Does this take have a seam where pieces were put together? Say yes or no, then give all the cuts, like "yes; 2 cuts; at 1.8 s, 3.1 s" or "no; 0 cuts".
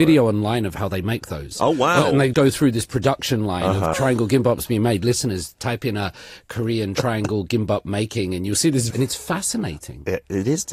yes; 3 cuts; at 2.3 s, 3.9 s, 8.9 s